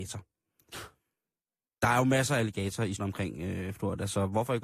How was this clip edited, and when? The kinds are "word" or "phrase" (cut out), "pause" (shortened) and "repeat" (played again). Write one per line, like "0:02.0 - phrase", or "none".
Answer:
0:03.0 - word